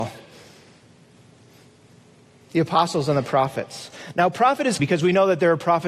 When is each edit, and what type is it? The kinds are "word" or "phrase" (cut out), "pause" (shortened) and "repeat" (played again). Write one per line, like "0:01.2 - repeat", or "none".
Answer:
0:04.8 - word